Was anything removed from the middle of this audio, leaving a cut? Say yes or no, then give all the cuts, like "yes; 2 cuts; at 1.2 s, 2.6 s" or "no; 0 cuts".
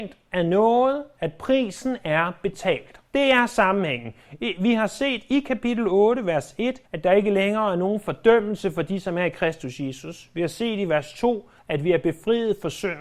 yes; 3 cuts; at 3.1 s, 6.9 s, 11.6 s